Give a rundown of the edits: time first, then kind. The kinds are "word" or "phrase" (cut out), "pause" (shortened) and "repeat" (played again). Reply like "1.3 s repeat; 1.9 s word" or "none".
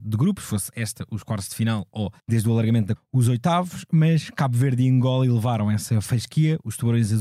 2.2 s pause; 3.0 s word